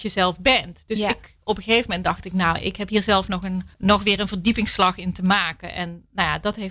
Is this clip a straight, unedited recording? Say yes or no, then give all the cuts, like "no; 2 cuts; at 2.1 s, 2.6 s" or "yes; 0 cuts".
no; 1 cut; at 3.7 s